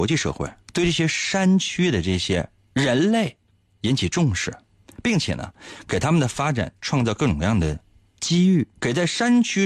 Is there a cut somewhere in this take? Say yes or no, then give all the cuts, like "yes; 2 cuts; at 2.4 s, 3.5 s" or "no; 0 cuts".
yes; 2 cuts; at 3.5 s, 8.8 s